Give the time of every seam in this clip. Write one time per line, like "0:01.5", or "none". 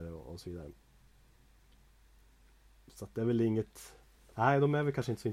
0:04.2